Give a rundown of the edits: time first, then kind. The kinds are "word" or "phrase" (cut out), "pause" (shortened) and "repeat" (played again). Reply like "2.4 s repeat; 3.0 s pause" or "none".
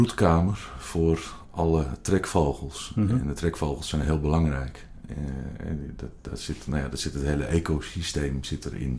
none